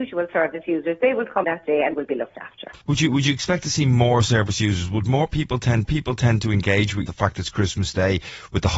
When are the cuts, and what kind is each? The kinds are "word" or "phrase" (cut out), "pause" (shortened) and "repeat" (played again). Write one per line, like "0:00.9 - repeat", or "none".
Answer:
0:01.4 - word
0:01.9 - word
0:02.8 - pause
0:05.8 - repeat
0:07.1 - phrase